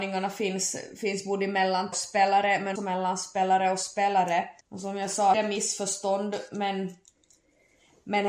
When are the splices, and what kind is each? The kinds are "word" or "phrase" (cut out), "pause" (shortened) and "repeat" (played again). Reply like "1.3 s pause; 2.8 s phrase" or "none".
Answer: 1.9 s phrase; 2.8 s word; 4.6 s pause; 5.3 s phrase